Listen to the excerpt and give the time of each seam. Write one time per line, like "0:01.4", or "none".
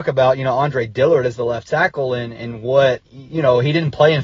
0:03.1